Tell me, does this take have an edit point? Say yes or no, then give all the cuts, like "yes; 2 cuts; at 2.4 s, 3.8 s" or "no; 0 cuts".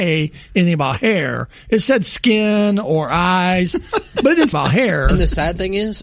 yes; 1 cut; at 4.5 s